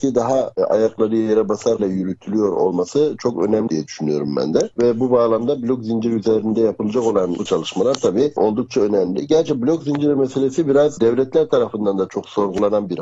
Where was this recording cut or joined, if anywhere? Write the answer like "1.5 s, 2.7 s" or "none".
1.8 s, 3.7 s, 7.5 s